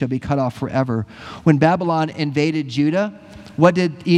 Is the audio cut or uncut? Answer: uncut